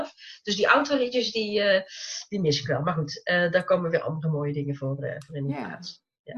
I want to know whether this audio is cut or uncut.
uncut